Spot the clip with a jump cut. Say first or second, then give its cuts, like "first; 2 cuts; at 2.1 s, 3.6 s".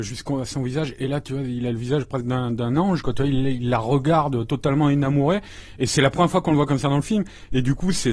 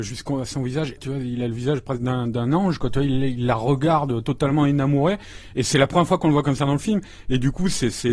second; 1 cut; at 1.0 s